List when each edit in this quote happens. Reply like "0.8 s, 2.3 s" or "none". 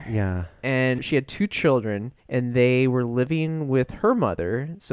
1.0 s, 2.2 s